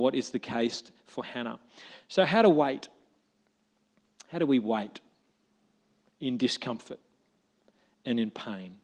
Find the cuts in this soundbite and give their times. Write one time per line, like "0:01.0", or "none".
none